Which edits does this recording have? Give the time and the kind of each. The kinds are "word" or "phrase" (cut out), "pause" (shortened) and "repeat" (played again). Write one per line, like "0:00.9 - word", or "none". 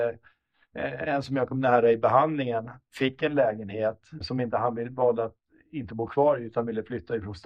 0:04.2 - word